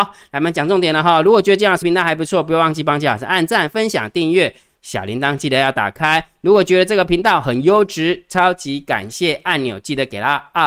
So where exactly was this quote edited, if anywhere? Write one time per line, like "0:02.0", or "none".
0:01.8